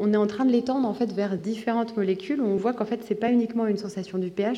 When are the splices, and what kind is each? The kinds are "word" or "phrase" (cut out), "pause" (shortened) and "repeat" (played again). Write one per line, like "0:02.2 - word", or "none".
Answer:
none